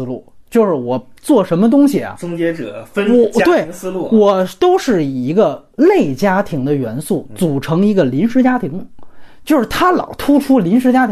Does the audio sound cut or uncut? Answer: cut